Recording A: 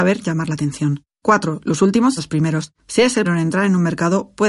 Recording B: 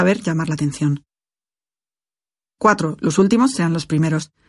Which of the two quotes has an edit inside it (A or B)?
A